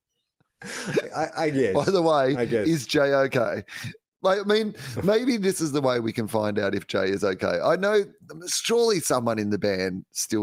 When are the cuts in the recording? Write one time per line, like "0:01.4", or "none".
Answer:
none